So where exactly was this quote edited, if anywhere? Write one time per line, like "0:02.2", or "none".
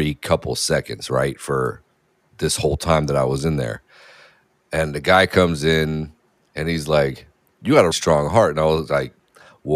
0:06.3
0:07.9